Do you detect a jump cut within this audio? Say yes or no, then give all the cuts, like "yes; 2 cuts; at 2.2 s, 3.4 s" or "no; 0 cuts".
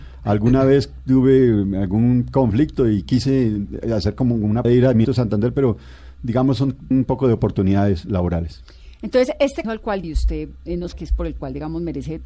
yes; 6 cuts; at 4.6 s, 5.0 s, 6.9 s, 9.6 s, 10.0 s, 10.9 s